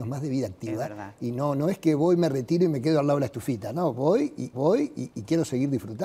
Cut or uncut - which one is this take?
cut